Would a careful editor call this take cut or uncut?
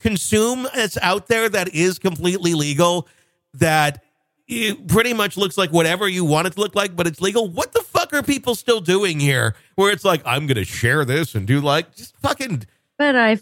uncut